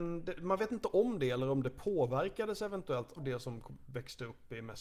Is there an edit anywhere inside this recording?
yes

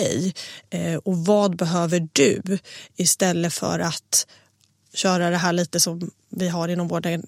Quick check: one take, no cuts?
yes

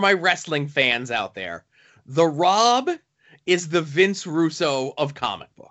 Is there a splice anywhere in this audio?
no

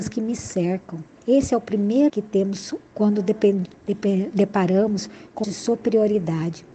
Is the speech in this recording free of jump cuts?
no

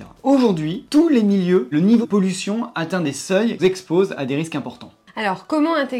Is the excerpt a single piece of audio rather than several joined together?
no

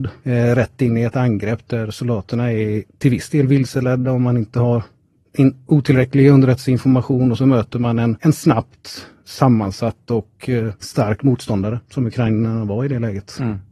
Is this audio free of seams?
yes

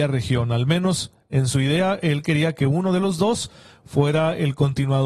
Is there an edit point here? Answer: no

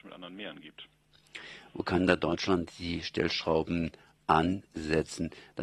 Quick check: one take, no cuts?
yes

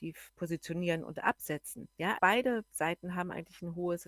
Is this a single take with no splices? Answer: no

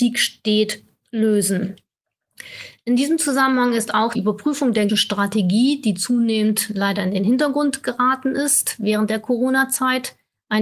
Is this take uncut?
no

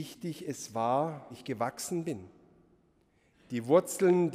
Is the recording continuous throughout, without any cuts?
no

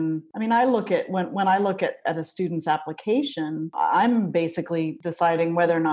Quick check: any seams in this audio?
no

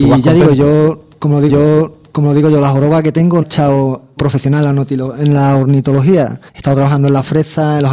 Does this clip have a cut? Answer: yes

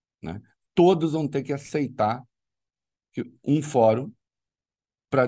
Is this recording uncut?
yes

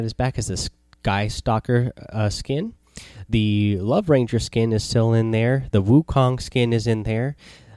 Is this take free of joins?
yes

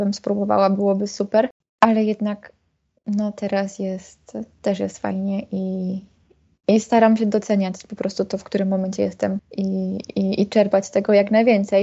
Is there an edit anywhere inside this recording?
no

